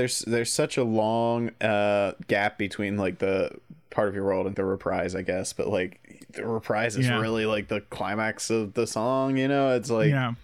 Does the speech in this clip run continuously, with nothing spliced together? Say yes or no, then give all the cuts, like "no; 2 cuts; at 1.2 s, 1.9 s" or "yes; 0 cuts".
no; 1 cut; at 4.5 s